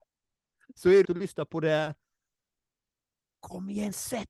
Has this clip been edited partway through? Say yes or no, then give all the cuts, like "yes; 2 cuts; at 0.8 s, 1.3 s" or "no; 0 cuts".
yes; 1 cut; at 1.0 s